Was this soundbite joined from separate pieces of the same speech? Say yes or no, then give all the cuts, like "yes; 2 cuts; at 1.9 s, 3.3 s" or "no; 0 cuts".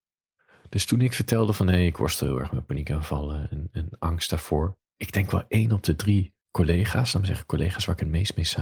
yes; 3 cuts; at 3.5 s, 4.9 s, 6.4 s